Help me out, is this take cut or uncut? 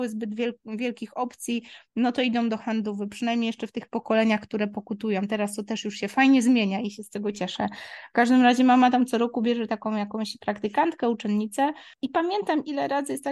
cut